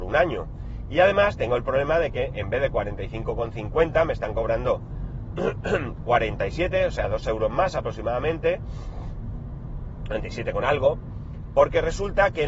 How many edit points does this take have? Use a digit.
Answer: 0